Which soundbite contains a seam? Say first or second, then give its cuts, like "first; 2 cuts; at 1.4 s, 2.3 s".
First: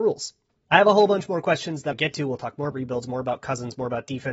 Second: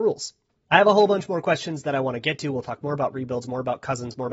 first; 2 cuts; at 1.9 s, 2.7 s